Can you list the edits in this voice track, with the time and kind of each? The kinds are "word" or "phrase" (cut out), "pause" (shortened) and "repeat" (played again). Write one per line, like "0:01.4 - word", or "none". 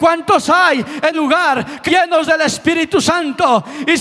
0:01.1 - word
0:01.9 - word